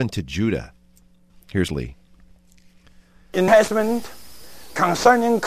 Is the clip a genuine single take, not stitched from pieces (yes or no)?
no